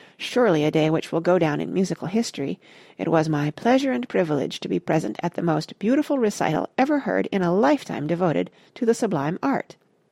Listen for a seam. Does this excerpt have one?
no; 0 cuts

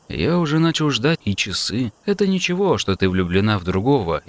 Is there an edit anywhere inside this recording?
yes; 2 cuts; at 1.2 s, 2.0 s

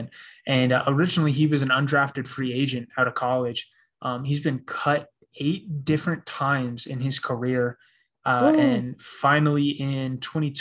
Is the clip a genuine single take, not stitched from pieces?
yes; 0 cuts

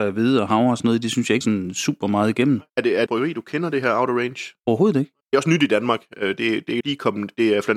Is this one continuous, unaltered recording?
no; 6 cuts; at 1.4 s, 2.7 s, 3.1 s, 4.6 s, 5.2 s, 6.8 s

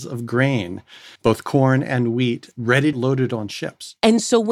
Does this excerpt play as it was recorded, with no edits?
no; 2 cuts; at 1.2 s, 2.9 s

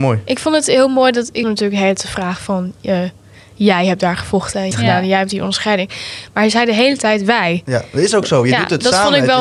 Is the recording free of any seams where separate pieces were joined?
no; 2 cuts; at 1.4 s, 4.7 s

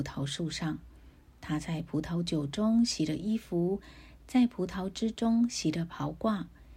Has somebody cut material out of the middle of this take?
no; 0 cuts

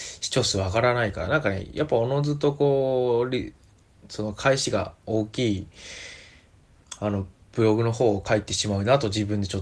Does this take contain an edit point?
no; 0 cuts

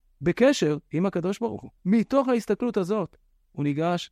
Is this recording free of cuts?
no; 1 cut; at 1.8 s

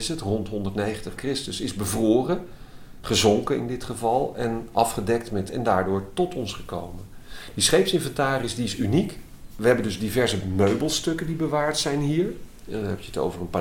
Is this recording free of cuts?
no; 2 cuts; at 1.2 s, 5.5 s

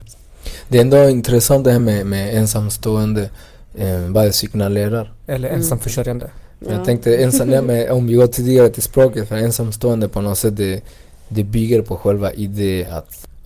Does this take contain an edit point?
no; 0 cuts

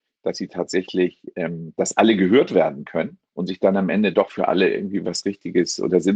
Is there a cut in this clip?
yes; 1 cut; at 3.3 s

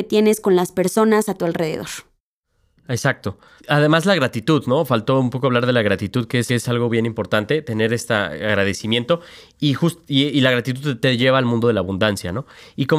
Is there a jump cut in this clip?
yes; 2 cuts; at 3.6 s, 6.5 s

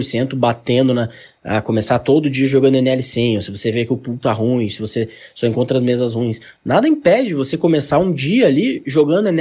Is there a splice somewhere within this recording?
no; 0 cuts

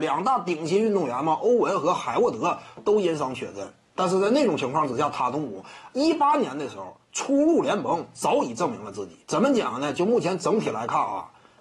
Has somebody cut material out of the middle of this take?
yes; 1 cut; at 9.2 s

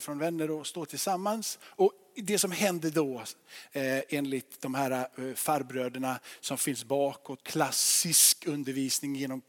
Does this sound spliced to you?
yes; 1 cut; at 7.4 s

